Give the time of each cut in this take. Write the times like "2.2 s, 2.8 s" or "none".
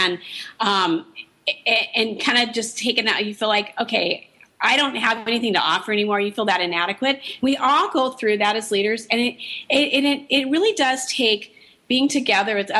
none